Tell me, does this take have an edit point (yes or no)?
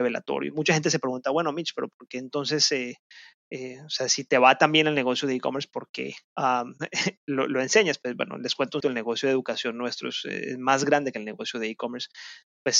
yes